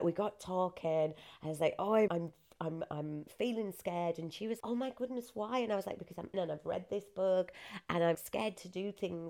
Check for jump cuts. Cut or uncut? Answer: cut